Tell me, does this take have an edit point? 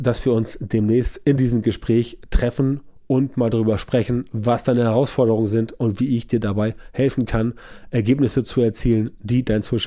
no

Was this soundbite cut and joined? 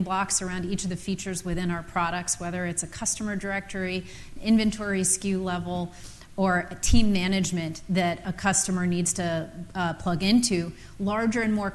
no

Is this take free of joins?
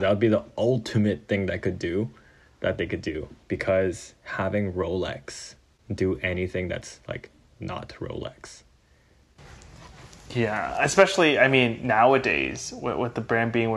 no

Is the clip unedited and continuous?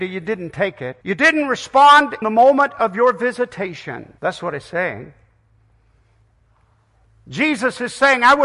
no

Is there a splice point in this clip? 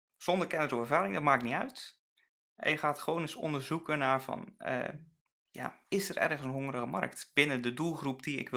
yes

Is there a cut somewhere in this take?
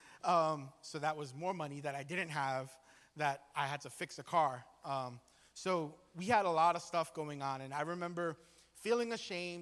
no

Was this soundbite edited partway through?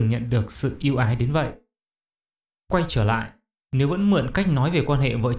no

